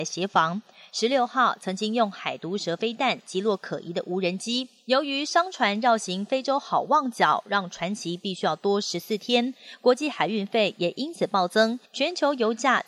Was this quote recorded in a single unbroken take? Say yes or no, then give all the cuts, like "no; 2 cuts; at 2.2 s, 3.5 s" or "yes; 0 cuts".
no; 1 cut; at 11.9 s